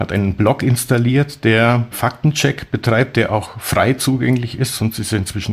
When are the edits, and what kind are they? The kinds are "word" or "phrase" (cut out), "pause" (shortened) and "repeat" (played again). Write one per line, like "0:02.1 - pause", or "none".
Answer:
none